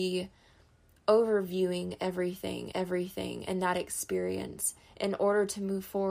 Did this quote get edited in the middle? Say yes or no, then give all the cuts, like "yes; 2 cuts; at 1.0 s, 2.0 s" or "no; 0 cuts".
yes; 1 cut; at 2.7 s